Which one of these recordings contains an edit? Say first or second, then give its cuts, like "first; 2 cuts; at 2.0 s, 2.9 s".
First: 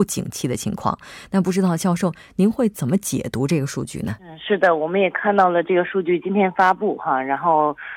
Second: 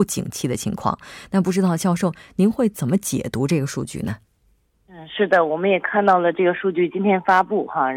first; 1 cut; at 4.2 s